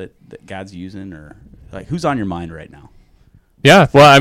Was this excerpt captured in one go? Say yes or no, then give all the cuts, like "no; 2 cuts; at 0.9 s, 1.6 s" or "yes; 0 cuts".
yes; 0 cuts